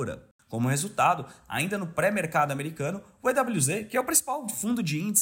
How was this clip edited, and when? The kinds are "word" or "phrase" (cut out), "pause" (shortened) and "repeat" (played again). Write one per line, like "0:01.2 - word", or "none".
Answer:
none